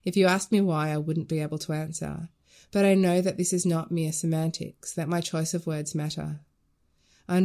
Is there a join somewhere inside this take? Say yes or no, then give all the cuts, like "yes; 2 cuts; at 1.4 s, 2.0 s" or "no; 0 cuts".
no; 0 cuts